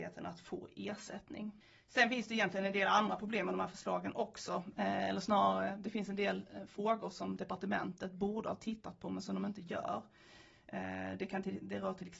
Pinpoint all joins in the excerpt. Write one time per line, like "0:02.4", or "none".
none